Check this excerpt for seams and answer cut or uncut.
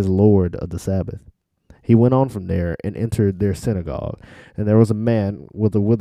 uncut